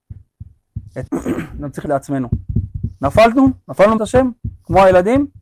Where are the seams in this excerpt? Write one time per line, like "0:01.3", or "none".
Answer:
0:01.1
0:01.9
0:04.0